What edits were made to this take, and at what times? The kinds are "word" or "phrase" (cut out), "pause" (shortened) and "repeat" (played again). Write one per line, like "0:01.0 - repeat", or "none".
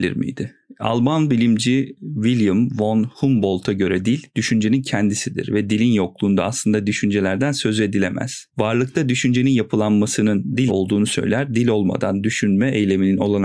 0:10.7 - word